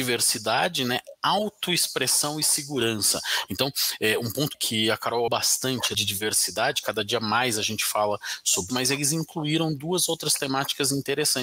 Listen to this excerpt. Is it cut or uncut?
cut